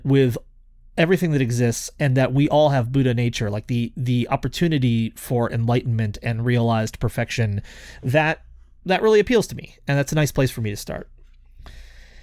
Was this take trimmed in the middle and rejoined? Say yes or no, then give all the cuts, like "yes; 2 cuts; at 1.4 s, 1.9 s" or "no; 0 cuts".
no; 0 cuts